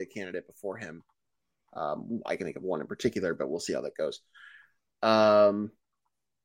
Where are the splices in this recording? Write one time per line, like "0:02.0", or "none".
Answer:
none